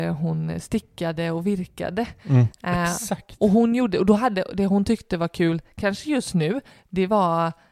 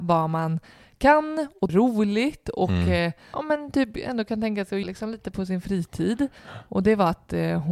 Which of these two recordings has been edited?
second; 3 cuts; at 1.7 s, 3.3 s, 4.8 s

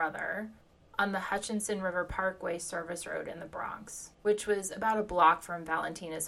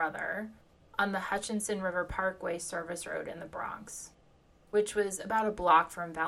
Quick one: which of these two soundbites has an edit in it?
first; 1 cut; at 4.2 s

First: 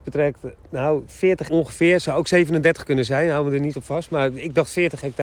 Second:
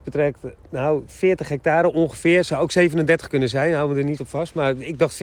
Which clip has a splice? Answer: first; 1 cut; at 1.5 s

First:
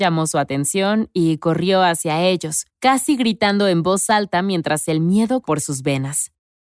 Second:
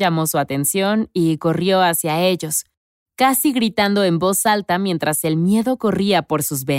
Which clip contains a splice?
first; 2 cuts; at 2.7 s, 5.4 s

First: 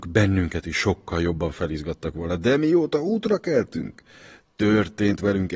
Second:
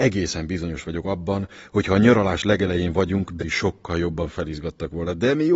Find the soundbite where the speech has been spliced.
second; 1 cut; at 3.4 s

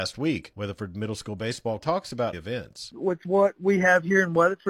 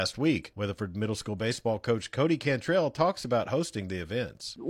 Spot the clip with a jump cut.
first; 2 cuts; at 1.8 s, 2.3 s

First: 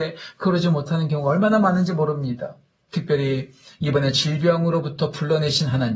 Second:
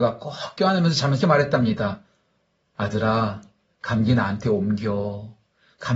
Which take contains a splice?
second; 1 cut; at 1.2 s

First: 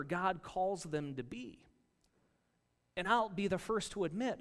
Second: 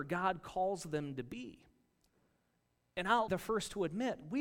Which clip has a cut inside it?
second; 1 cut; at 3.3 s

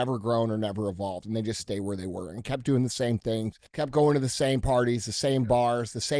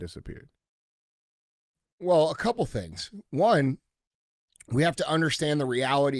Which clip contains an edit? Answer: first; 1 cut; at 3.7 s

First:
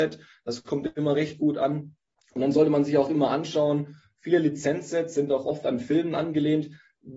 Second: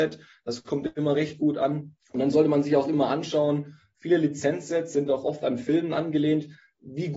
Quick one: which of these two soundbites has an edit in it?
second; 1 cut; at 2.0 s

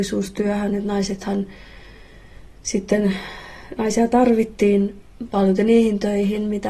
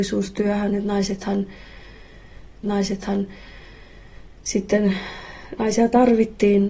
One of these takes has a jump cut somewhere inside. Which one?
second; 1 cut; at 2.6 s

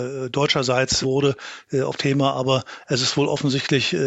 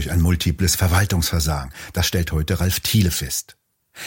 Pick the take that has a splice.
first; 2 cuts; at 1.0 s, 2.0 s

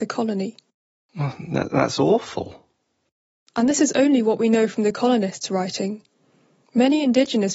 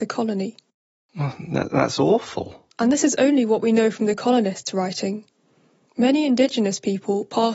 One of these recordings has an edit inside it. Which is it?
second; 1 cut; at 2.7 s

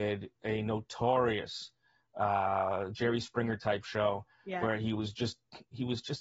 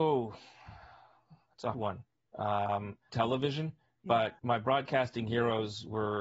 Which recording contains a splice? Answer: second; 3 cuts; at 1.7 s, 3.1 s, 4.4 s

